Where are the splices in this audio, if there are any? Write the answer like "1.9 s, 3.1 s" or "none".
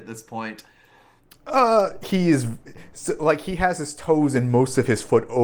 none